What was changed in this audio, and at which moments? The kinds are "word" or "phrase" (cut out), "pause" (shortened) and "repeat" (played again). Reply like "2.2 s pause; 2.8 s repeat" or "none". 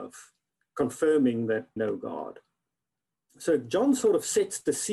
1.8 s word